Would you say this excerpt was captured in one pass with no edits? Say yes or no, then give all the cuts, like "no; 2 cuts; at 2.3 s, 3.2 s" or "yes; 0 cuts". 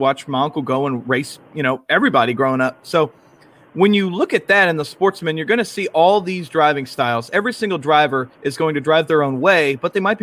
yes; 0 cuts